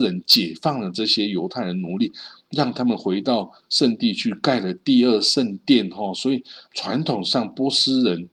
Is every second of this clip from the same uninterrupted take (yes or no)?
no